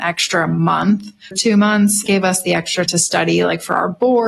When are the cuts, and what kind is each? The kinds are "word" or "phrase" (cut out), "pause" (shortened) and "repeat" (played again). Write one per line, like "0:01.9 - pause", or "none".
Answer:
0:01.3 - word
0:02.1 - word
0:02.9 - word